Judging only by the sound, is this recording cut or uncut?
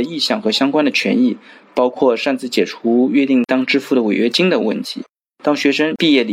uncut